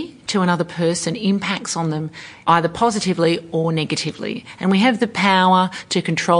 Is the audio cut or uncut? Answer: uncut